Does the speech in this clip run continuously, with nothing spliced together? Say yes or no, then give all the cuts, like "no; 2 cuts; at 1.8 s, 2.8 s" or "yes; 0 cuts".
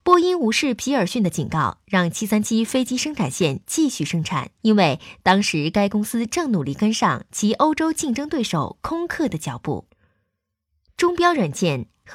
no; 1 cut; at 4.6 s